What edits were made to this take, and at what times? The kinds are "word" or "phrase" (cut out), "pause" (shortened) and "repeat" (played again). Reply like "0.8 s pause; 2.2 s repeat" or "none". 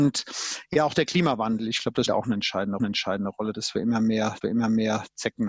2.1 s word; 2.8 s repeat; 4.4 s repeat